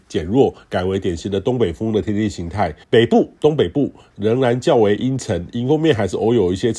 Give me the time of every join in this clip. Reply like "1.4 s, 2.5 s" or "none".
2.8 s

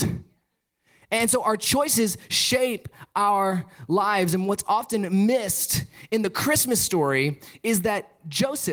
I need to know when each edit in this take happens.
none

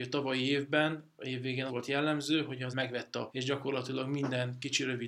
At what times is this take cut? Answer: 1.7 s, 2.7 s, 3.3 s

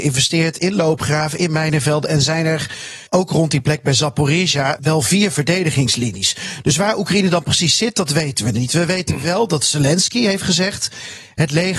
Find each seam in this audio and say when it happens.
3.1 s, 4.8 s

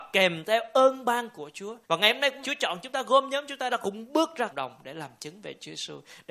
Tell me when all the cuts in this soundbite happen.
1.8 s, 2.4 s, 3.7 s, 4.5 s

